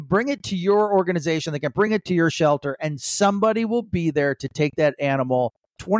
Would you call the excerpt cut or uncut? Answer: uncut